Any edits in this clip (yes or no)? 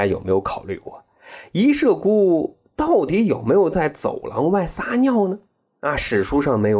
no